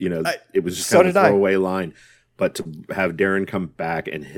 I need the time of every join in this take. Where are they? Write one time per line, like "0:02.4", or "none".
none